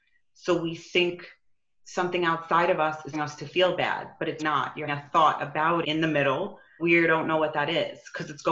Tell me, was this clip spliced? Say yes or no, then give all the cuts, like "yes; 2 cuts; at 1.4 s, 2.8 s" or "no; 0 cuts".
yes; 5 cuts; at 3.1 s, 4.4 s, 4.9 s, 5.8 s, 6.8 s